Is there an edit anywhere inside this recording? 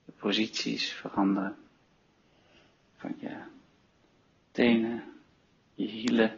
no; 0 cuts

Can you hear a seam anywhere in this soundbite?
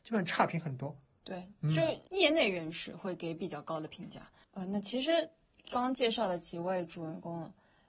no; 0 cuts

